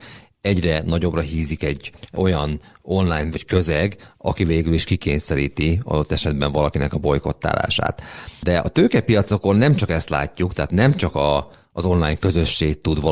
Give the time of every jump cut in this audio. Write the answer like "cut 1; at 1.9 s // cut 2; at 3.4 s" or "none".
cut 1; at 3.3 s